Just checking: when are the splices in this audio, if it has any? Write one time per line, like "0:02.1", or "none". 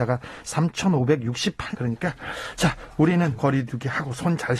0:01.7
0:03.4

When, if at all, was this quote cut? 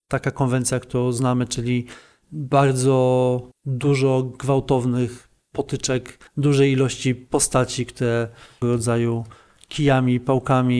0:03.5
0:06.3
0:08.6

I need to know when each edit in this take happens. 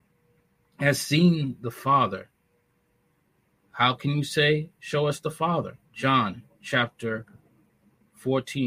0:05.8

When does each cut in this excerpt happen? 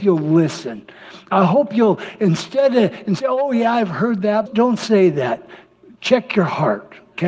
0:04.5

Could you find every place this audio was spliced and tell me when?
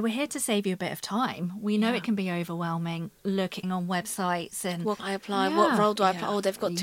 0:03.2
0:03.6
0:05.0

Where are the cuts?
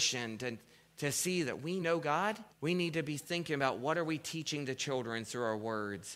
0:01.8
0:02.5

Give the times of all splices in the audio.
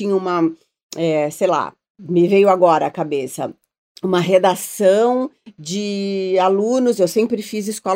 none

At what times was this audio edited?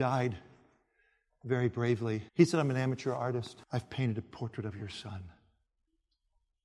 0:02.3
0:03.6

